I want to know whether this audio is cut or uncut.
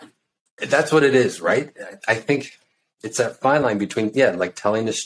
uncut